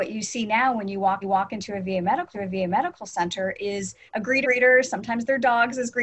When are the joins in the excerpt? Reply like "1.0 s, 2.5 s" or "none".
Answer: 1.2 s, 2.3 s, 4.1 s, 4.4 s